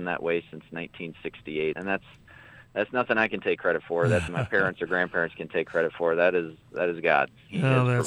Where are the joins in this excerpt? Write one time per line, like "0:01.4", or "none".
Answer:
0:01.7
0:04.3